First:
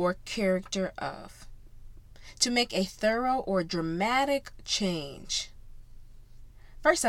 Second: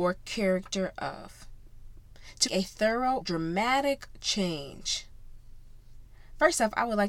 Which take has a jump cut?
second; 2 cuts; at 2.5 s, 3.2 s

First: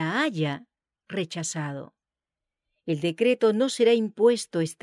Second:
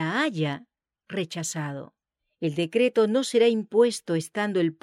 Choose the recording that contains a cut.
second; 1 cut; at 2.2 s

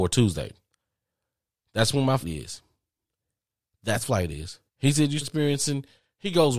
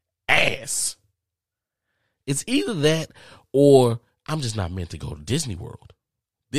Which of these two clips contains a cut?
first; 4 cuts; at 2.2 s, 4.0 s, 4.7 s, 5.2 s

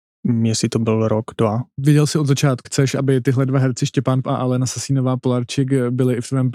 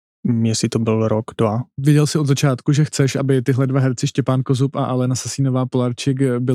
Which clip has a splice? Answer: first; 2 cuts; at 2.6 s, 4.2 s

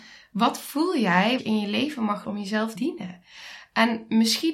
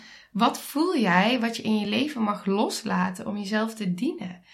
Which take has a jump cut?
first; 3 cuts; at 1.4 s, 2.2 s, 2.7 s

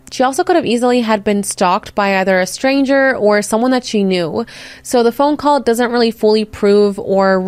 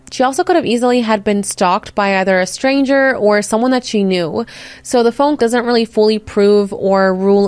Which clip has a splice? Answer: second; 1 cut; at 5.4 s

